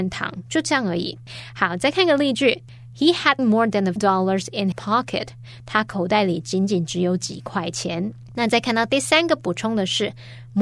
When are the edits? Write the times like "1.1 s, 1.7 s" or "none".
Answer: 3.4 s, 4.0 s, 4.7 s

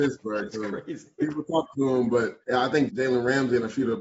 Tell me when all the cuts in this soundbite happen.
1.7 s, 2.4 s, 2.9 s

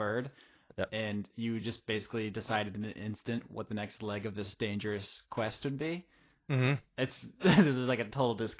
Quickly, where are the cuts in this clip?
none

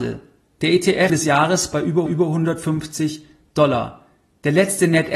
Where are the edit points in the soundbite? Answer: 1.1 s, 2.1 s

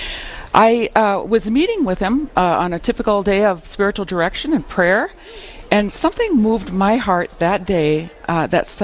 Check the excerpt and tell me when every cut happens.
none

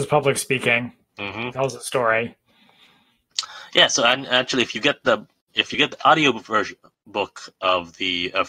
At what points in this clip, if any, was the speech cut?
none

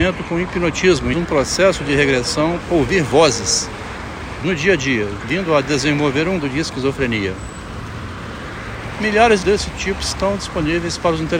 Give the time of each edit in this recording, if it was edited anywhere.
1.1 s, 2.6 s, 4.4 s, 5.2 s, 6.4 s, 9.4 s

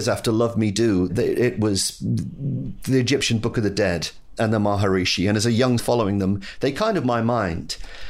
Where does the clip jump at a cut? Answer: 1.1 s, 5.8 s, 7.0 s

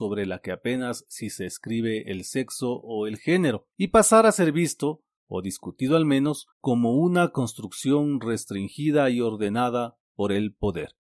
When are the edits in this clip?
3.7 s, 6.5 s

